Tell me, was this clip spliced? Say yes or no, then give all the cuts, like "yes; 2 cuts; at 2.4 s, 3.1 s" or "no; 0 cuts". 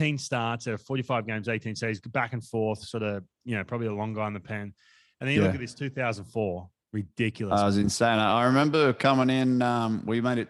no; 0 cuts